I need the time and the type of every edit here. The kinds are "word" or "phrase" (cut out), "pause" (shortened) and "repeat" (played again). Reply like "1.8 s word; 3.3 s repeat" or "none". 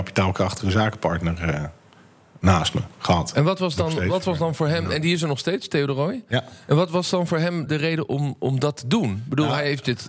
7.7 s word